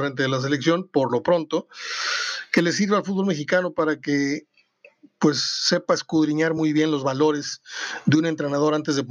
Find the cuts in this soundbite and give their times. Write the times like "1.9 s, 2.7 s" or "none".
none